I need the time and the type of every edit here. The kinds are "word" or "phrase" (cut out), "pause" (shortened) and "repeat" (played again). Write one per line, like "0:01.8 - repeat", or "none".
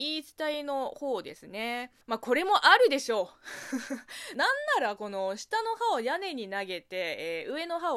0:02.0 - pause